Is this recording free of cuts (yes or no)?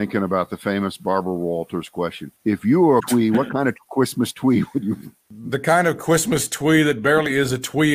no